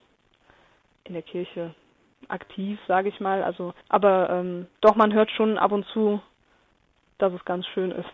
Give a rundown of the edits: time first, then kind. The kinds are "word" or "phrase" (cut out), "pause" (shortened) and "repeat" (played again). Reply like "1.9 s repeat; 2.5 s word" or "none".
3.8 s pause; 4.8 s pause